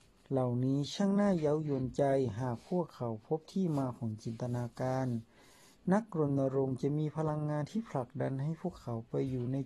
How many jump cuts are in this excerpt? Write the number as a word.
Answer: zero